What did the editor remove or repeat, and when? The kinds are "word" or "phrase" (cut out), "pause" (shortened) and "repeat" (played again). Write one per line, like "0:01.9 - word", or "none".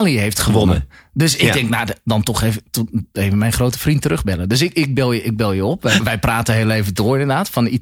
0:06.0 - word